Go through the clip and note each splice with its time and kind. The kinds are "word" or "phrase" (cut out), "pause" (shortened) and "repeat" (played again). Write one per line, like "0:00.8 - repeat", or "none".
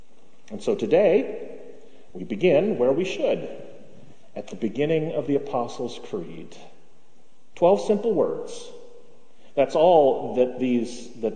none